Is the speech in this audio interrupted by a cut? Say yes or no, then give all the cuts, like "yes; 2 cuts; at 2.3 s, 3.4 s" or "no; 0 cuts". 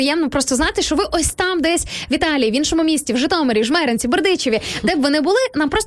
no; 0 cuts